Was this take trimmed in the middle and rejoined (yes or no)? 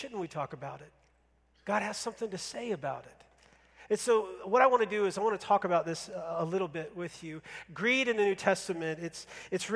no